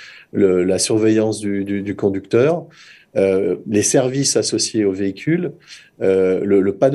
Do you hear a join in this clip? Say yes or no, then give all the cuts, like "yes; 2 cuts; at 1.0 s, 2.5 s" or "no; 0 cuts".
no; 0 cuts